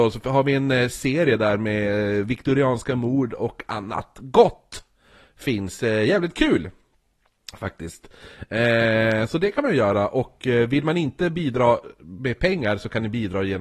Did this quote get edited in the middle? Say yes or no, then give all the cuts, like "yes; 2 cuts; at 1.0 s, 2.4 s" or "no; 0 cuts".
no; 0 cuts